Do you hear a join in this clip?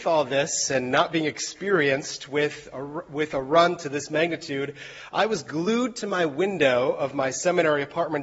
no; 0 cuts

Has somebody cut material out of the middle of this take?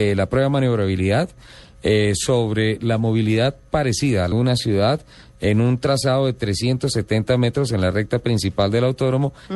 yes; 1 cut; at 4.3 s

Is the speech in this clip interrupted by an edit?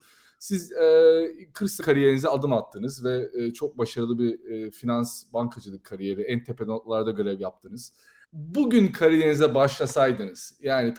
yes; 1 cut; at 1.8 s

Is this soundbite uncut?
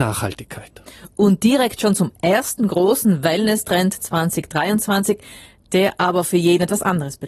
yes; 0 cuts

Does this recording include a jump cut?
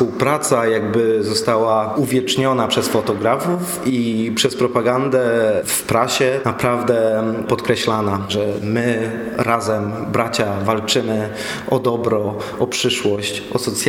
no; 0 cuts

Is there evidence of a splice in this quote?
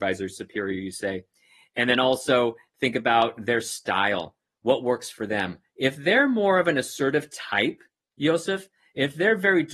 no; 0 cuts

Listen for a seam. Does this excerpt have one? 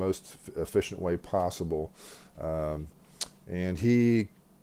no; 0 cuts

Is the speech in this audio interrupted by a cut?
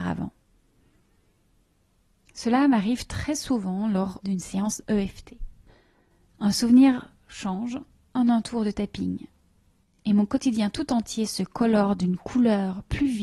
no; 0 cuts

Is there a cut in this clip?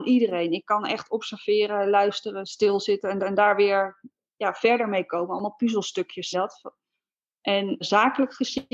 yes; 3 cuts; at 3.2 s, 6.3 s, 7.8 s

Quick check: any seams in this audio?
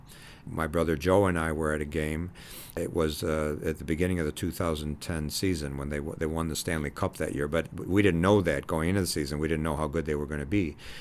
no; 0 cuts

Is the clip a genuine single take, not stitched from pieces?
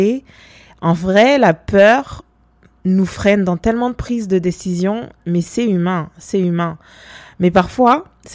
yes; 0 cuts

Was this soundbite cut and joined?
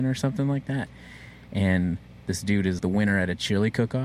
yes; 1 cut; at 2.8 s

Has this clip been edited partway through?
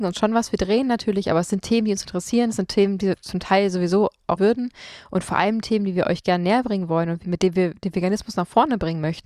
yes; 1 cut; at 4.4 s

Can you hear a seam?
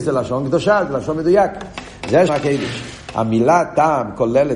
yes; 1 cut; at 2.3 s

